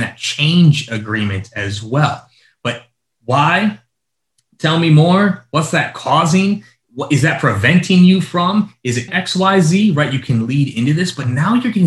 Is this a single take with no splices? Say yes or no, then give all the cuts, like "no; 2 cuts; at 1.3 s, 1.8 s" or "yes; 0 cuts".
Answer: no; 1 cut; at 9.1 s